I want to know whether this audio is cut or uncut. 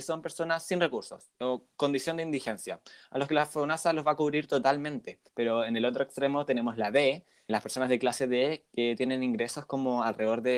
cut